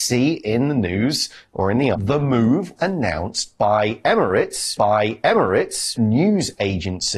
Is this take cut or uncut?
cut